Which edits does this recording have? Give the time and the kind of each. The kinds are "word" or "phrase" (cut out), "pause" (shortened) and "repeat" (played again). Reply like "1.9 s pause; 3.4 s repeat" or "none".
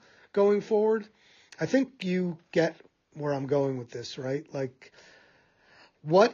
none